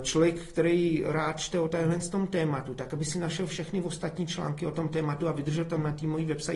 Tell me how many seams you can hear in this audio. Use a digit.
0